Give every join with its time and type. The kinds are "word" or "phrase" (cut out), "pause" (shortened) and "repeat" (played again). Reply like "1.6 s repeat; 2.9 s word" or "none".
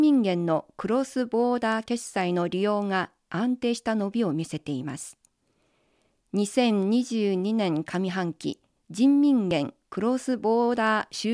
none